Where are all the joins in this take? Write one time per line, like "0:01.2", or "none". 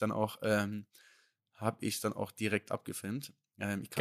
none